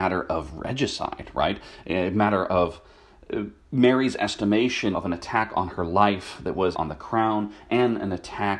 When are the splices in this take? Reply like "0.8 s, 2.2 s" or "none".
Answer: 4.9 s, 6.7 s